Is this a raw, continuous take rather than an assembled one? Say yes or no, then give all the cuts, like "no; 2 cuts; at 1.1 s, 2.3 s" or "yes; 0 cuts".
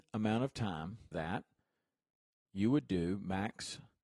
no; 1 cut; at 1.1 s